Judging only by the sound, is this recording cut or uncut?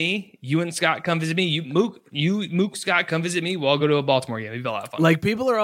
uncut